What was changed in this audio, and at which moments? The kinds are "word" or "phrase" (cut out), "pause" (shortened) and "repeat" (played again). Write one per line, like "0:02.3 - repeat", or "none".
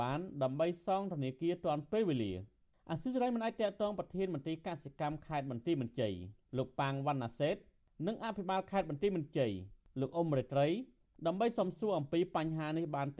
none